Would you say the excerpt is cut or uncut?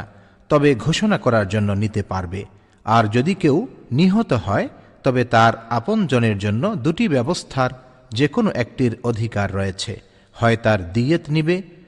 uncut